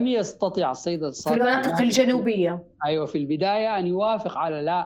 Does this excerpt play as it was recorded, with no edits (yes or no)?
yes